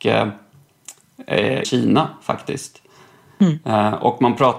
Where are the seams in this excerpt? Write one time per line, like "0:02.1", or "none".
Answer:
0:01.6